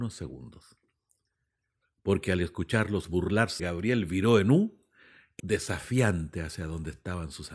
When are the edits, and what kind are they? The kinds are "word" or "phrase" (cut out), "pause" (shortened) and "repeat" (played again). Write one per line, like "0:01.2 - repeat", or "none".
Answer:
0:03.6 - word
0:05.4 - word